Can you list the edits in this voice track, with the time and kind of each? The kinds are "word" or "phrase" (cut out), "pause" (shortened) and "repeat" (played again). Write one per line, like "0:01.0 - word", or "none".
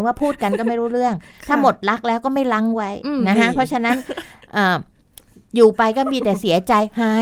none